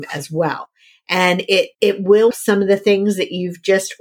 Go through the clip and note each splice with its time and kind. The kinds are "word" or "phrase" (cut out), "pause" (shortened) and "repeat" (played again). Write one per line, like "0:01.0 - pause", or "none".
0:01.7 - pause
0:02.3 - phrase